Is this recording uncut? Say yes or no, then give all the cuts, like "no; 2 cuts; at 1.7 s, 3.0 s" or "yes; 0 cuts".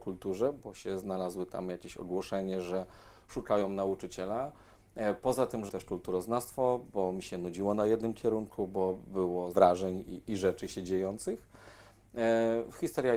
no; 2 cuts; at 5.7 s, 9.5 s